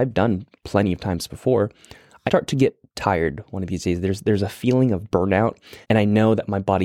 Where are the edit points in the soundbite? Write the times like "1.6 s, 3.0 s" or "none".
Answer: 2.3 s, 5.8 s